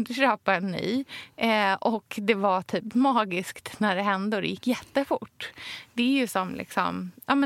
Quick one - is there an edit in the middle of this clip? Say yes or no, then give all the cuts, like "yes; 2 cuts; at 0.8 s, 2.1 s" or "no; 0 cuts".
no; 0 cuts